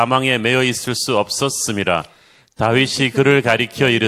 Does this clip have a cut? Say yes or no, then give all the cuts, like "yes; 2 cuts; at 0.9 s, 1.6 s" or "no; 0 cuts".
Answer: no; 0 cuts